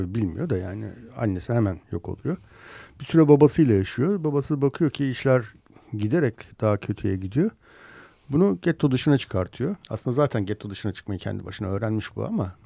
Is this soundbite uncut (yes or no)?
no